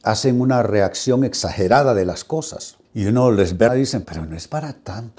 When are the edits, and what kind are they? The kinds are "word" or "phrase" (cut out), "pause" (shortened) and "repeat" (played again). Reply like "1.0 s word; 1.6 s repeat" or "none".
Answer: 2.8 s pause; 3.7 s word; 4.0 s word